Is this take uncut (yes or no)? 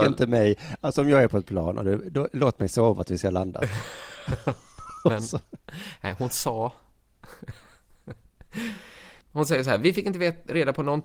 no